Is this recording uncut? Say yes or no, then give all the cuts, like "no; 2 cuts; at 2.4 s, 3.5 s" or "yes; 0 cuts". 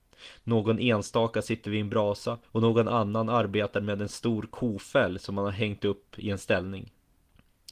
no; 1 cut; at 2.4 s